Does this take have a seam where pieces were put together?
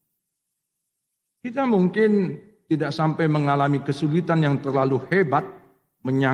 no; 0 cuts

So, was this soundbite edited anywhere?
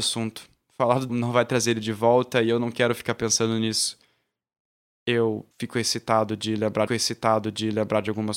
yes; 3 cuts; at 1.1 s, 5.5 s, 6.9 s

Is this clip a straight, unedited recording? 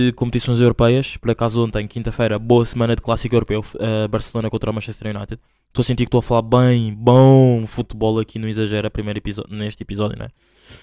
no; 1 cut; at 5.5 s

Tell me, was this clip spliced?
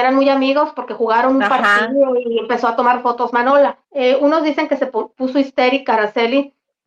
yes; 1 cut; at 3.8 s

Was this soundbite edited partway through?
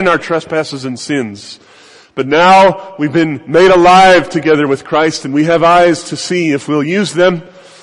no; 0 cuts

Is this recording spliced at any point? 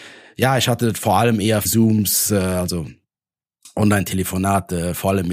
yes; 1 cut; at 1.6 s

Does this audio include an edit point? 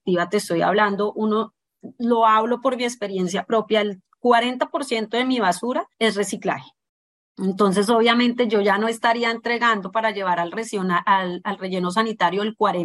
yes; 2 cuts; at 5.9 s, 6.9 s

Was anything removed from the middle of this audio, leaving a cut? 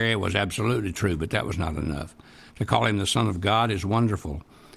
no; 0 cuts

